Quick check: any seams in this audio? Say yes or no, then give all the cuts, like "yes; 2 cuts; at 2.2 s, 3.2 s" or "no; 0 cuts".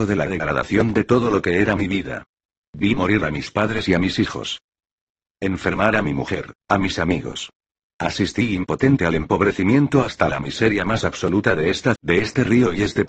yes; 2 cuts; at 6.6 s, 12.0 s